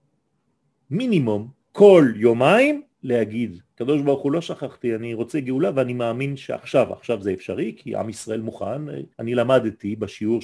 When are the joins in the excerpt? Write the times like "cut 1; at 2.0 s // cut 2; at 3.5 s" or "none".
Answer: cut 1; at 1.6 s // cut 2; at 2.9 s // cut 3; at 9.1 s

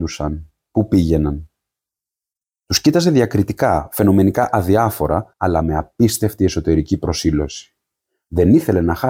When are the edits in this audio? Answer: cut 1; at 5.3 s

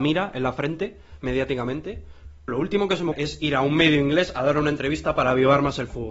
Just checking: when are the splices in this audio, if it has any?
cut 1; at 2.5 s // cut 2; at 3.1 s

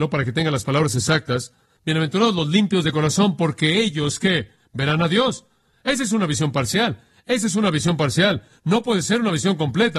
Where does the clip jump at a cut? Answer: none

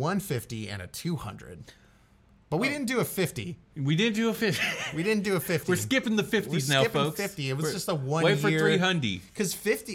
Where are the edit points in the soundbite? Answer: none

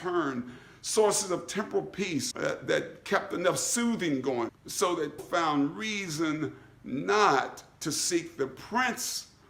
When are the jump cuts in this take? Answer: cut 1; at 2.3 s // cut 2; at 4.5 s // cut 3; at 5.2 s

